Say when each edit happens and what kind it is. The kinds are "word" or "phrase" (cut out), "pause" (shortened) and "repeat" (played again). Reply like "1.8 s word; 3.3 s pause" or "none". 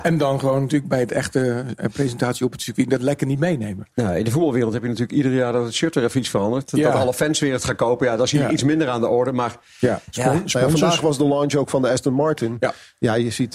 none